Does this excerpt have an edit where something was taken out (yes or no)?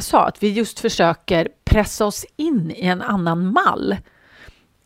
no